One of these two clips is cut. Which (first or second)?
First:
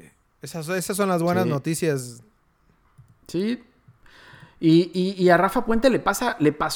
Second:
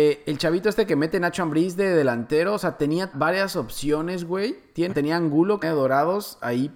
second